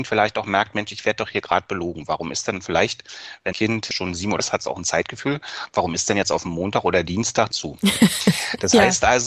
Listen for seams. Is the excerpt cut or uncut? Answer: cut